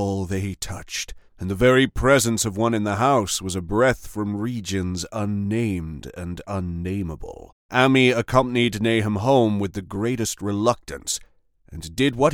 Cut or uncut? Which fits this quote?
cut